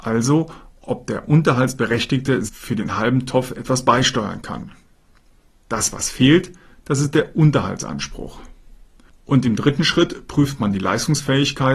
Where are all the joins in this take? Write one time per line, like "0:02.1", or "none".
0:02.5